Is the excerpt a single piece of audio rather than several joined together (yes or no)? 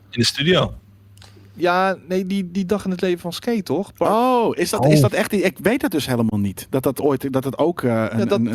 yes